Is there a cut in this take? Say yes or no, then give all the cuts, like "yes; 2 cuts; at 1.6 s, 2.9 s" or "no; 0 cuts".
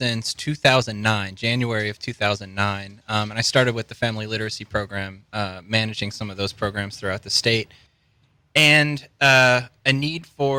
no; 0 cuts